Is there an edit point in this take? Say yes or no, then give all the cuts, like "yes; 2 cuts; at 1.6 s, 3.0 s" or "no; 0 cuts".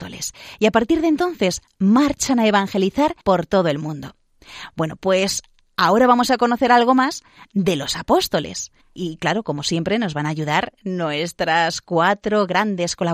yes; 2 cuts; at 3.2 s, 8.8 s